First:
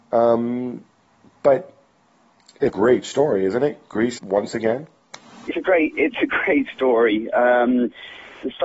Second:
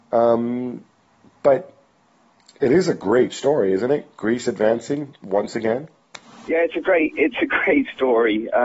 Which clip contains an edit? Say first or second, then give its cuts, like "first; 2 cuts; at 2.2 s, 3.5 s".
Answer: first; 3 cuts; at 2.7 s, 4.2 s, 5.5 s